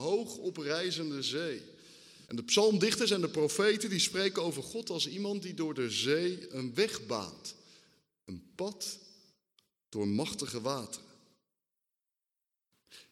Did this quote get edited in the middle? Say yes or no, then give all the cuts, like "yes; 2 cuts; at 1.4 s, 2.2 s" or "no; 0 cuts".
yes; 1 cut; at 2.2 s